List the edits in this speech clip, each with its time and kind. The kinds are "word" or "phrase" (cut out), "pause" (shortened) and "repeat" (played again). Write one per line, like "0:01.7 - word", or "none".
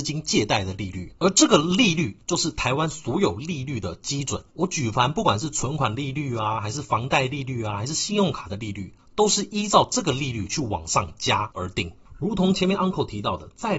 0:01.2 - pause
0:04.5 - pause